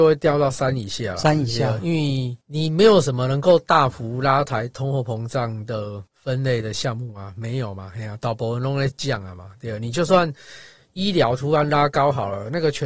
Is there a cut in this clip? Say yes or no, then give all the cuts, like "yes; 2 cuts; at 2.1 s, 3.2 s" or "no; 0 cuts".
yes; 2 cuts; at 2.4 s, 6.1 s